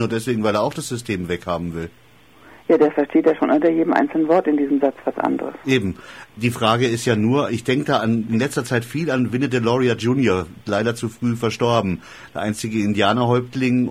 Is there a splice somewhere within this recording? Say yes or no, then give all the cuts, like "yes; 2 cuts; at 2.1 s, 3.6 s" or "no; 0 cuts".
no; 0 cuts